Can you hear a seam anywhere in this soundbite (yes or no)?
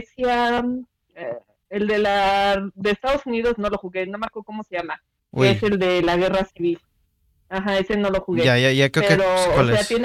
no